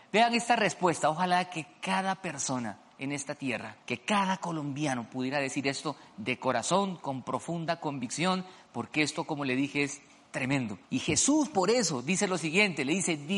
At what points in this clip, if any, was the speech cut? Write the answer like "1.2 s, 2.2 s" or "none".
3.8 s, 10.8 s